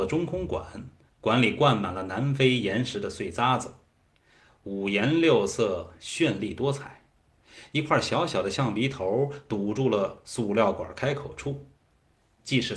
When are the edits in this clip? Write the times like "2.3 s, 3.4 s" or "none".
none